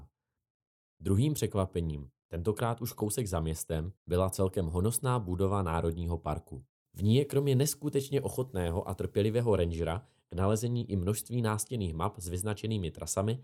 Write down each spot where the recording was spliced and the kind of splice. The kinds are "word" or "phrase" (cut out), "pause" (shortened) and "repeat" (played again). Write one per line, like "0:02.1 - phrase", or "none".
0:04.0 - pause
0:06.8 - pause